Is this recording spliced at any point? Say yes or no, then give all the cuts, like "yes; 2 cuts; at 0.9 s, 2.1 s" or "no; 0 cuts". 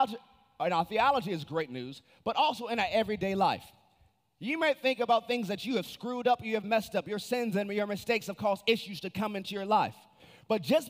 no; 0 cuts